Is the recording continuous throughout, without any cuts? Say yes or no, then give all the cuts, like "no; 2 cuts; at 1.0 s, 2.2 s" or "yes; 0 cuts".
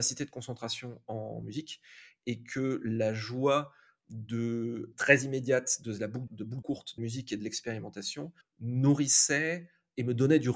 no; 5 cuts; at 4.9 s, 6.3 s, 6.6 s, 7.0 s, 8.4 s